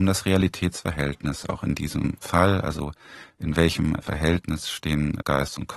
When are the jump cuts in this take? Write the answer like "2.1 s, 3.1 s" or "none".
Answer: none